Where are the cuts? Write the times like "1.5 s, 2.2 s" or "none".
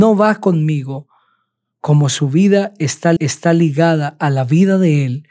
3.2 s